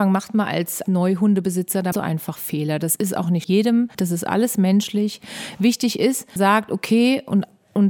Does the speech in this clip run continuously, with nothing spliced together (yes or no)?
no